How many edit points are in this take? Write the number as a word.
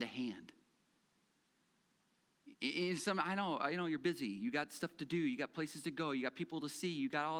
zero